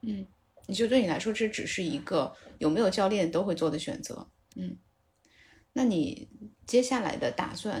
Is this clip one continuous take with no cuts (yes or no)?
no